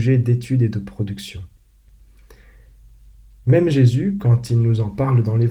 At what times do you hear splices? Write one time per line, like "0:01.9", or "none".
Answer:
none